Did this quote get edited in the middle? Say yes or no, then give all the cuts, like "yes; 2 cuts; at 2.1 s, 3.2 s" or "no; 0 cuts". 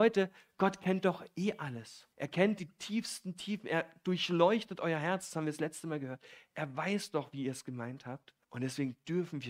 yes; 2 cuts; at 2.1 s, 8.4 s